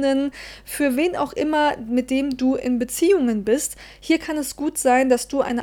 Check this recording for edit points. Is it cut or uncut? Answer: uncut